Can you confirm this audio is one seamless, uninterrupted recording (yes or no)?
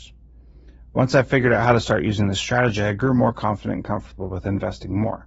yes